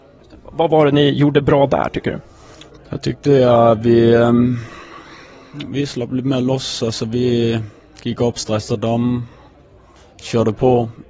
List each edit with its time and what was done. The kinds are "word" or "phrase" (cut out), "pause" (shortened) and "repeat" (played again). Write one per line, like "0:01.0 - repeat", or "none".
none